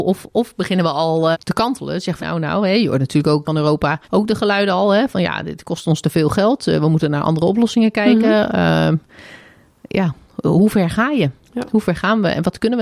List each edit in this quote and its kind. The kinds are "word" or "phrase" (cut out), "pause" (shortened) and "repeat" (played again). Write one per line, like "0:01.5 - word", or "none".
0:01.3 - word
0:02.2 - word
0:03.4 - phrase
0:04.0 - pause